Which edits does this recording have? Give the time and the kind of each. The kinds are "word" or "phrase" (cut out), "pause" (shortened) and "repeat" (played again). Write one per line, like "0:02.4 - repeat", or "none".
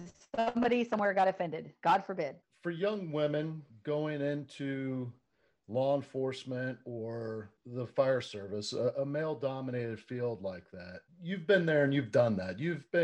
0:03.7 - pause